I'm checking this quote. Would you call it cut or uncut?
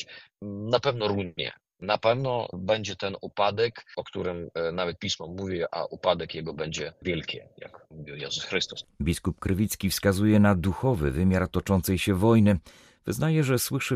uncut